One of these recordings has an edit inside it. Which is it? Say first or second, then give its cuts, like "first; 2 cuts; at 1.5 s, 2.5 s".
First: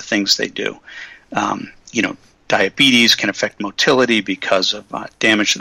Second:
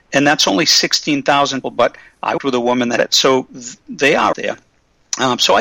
second; 4 cuts; at 1.6 s, 2.4 s, 3.0 s, 4.3 s